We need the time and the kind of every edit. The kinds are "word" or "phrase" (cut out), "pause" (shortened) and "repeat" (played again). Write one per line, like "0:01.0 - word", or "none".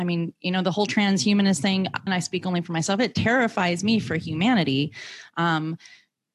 0:02.1 - word